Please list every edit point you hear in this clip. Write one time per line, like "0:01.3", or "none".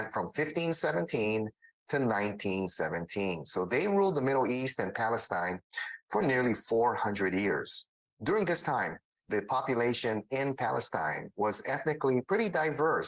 none